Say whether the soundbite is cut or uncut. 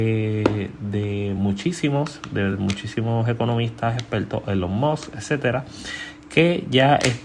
uncut